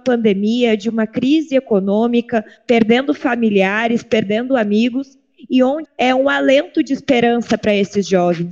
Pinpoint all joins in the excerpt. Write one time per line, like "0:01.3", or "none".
0:05.8